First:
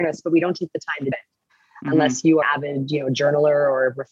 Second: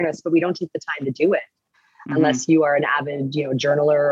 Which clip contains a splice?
first; 2 cuts; at 1.1 s, 2.4 s

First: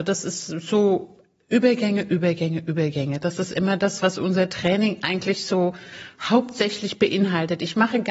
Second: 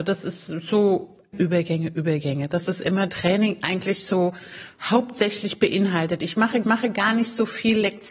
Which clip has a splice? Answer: second; 3 cuts; at 1.3 s, 3.1 s, 6.6 s

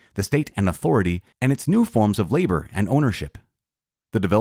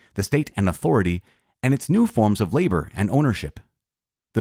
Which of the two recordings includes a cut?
first; 1 cut; at 1.3 s

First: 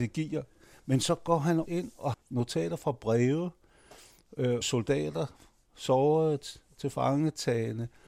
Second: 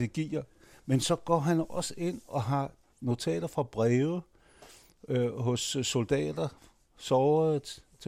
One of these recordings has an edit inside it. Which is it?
first; 3 cuts; at 1.7 s, 2.1 s, 4.6 s

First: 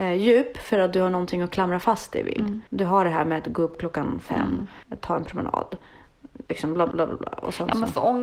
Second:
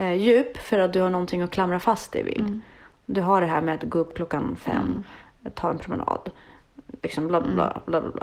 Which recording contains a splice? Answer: first; 3 cuts; at 2.7 s, 4.8 s, 6.9 s

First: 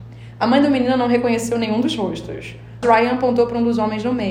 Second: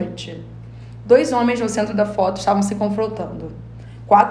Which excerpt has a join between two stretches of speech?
first; 1 cut; at 2.8 s

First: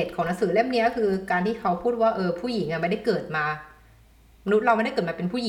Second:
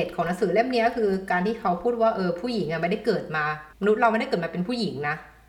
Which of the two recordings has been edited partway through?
second; 1 cut; at 3.7 s

